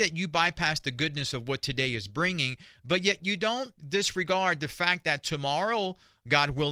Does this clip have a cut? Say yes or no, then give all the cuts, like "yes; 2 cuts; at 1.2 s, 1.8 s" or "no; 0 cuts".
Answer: yes; 1 cut; at 3.8 s